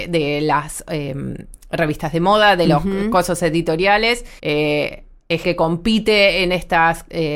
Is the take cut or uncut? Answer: cut